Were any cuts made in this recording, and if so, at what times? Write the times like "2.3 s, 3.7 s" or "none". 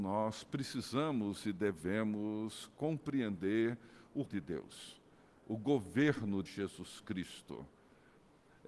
4.3 s, 6.5 s